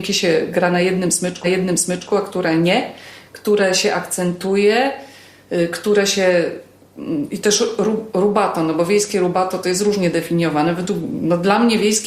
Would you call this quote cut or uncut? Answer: cut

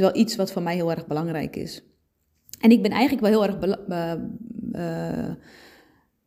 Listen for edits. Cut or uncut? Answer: uncut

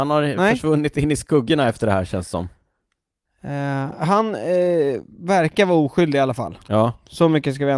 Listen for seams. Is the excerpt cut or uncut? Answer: uncut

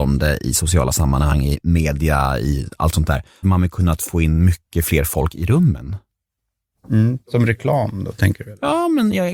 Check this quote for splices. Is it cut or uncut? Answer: cut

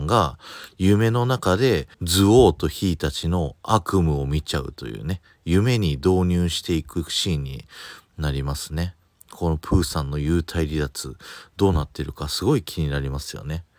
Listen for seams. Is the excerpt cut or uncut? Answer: cut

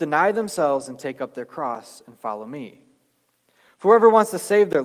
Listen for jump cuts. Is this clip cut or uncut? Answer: uncut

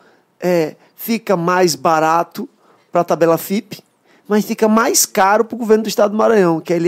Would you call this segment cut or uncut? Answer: uncut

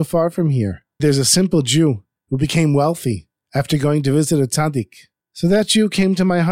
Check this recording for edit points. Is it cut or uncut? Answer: cut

